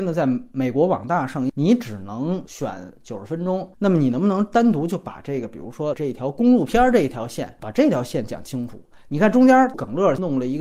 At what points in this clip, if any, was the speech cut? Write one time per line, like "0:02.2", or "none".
0:03.7